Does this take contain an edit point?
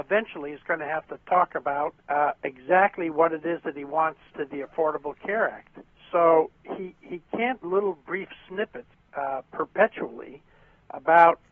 yes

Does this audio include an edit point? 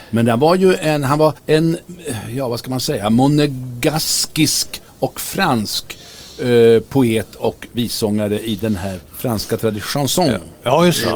yes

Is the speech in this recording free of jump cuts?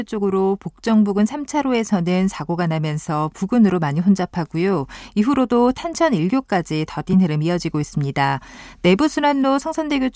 yes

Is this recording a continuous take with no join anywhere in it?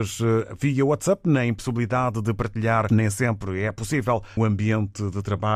no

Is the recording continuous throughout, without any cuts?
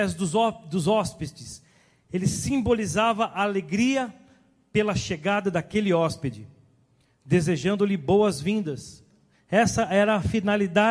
yes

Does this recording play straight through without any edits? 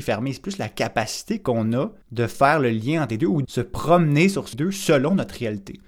no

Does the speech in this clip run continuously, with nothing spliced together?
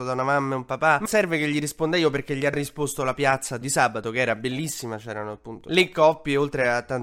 no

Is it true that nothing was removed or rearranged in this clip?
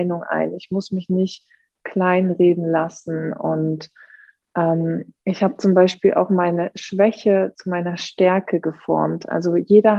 no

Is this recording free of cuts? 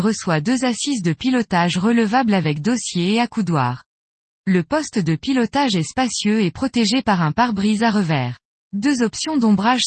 no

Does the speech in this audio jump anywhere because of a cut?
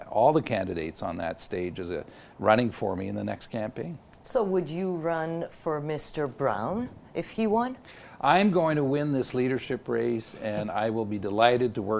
no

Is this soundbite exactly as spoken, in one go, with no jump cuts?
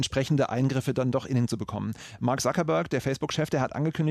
no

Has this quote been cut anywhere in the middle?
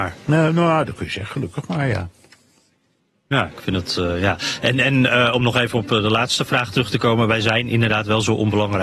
no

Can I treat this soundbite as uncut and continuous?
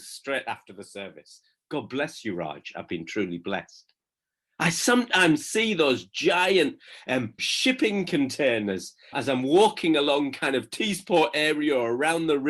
no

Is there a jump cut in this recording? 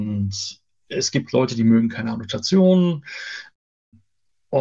no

